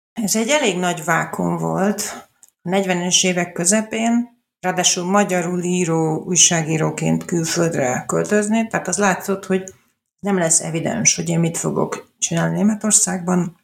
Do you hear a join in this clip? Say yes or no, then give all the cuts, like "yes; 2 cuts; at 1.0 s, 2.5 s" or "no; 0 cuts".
no; 0 cuts